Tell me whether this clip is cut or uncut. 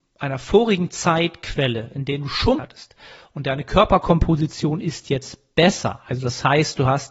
cut